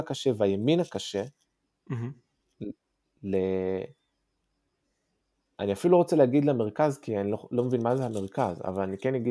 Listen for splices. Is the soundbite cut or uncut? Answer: uncut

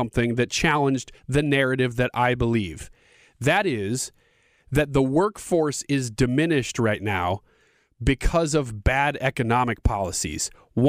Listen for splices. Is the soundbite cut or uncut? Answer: uncut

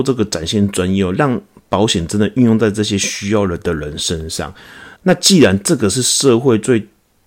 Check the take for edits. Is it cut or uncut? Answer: cut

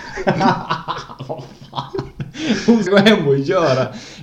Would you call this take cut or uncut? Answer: cut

